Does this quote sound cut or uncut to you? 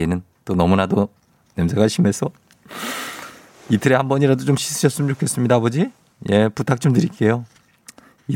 uncut